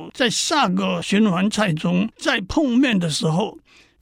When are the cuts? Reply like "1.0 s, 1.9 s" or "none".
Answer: 2.1 s